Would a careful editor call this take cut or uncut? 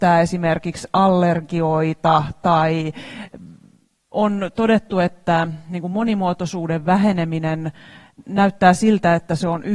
uncut